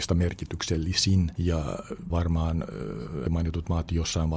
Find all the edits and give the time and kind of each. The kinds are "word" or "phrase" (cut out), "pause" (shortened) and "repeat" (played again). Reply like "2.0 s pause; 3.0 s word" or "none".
2.1 s word; 3.3 s word